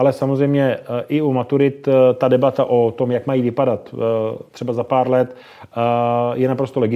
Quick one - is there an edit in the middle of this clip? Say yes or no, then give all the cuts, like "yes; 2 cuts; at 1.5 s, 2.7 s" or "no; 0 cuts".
no; 0 cuts